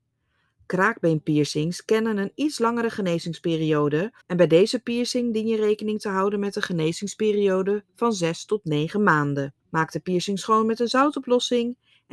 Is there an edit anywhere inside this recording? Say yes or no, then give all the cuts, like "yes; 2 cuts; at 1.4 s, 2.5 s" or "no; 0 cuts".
yes; 3 cuts; at 4.2 s, 7.9 s, 9.6 s